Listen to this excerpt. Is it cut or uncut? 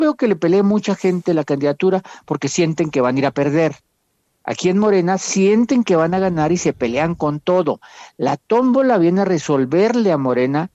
uncut